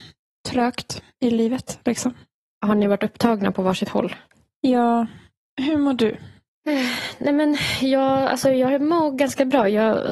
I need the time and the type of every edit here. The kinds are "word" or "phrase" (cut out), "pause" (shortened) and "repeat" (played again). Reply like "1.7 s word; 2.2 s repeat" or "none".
none